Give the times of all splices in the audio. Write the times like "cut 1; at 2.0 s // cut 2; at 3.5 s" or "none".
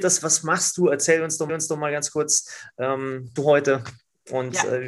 cut 1; at 1.5 s // cut 2; at 3.4 s